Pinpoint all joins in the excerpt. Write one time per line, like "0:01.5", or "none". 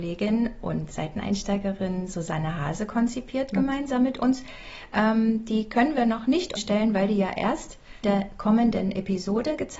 0:06.6
0:08.0